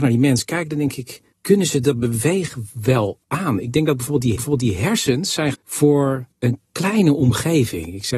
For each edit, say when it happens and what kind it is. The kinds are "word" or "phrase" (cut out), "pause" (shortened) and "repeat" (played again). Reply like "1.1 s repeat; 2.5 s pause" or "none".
1.3 s word; 3.2 s pause; 4.4 s repeat; 5.5 s word; 6.3 s pause

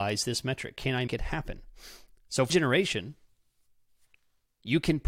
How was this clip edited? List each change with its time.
1.1 s word; 2.5 s word

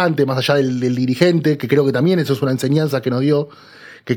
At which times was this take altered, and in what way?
none

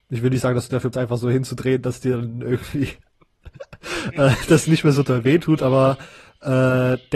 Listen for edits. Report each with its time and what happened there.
0.9 s phrase

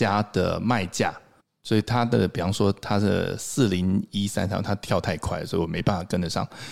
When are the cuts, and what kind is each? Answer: 1.4 s pause

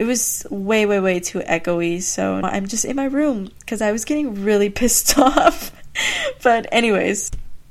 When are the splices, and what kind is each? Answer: 2.4 s word

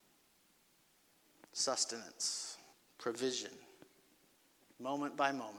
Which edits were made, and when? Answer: 2.7 s pause

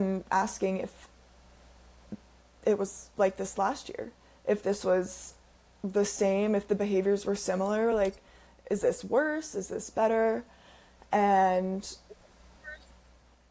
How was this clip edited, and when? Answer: none

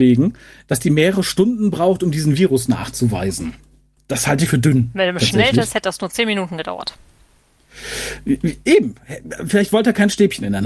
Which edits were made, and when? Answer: 4.5 s word

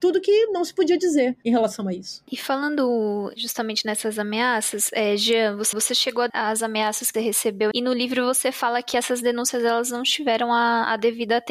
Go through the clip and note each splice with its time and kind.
5.7 s repeat; 6.3 s word; 7.1 s word; 7.7 s phrase

